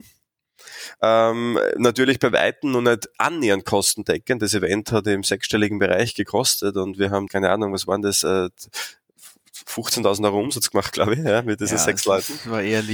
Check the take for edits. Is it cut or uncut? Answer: cut